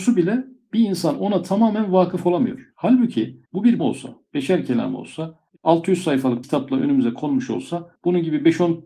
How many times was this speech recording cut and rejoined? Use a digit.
5